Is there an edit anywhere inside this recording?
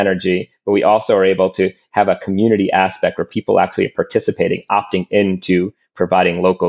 no; 0 cuts

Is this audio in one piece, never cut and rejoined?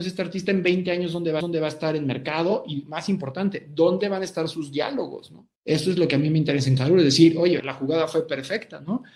no; 4 cuts; at 1.4 s, 5.6 s, 6.8 s, 7.6 s

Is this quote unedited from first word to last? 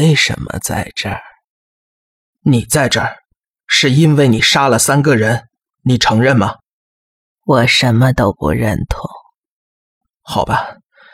no; 1 cut; at 5.5 s

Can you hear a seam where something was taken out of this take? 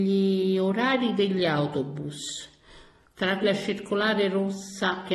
yes; 1 cut; at 3.4 s

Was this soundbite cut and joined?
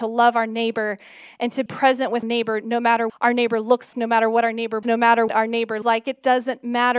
yes; 7 cuts; at 1.7 s, 2.2 s, 3.1 s, 3.9 s, 4.8 s, 5.3 s, 5.8 s

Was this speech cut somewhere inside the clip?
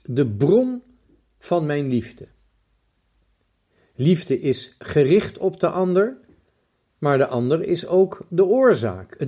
no; 0 cuts

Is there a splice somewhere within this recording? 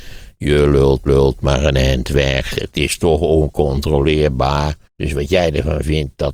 yes; 2 cuts; at 1.1 s, 4.8 s

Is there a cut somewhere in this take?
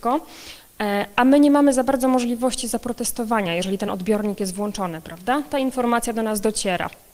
no; 0 cuts

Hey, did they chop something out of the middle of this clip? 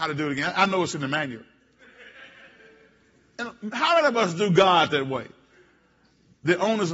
no; 0 cuts

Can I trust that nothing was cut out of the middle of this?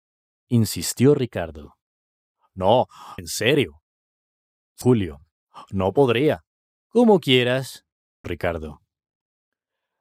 no; 4 cuts; at 3.2 s, 4.8 s, 6.7 s, 8.2 s

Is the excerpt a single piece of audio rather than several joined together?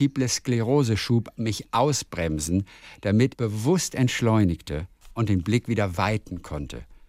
no; 1 cut; at 3.3 s

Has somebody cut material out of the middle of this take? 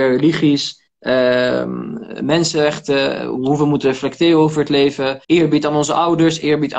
yes; 1 cut; at 5.2 s

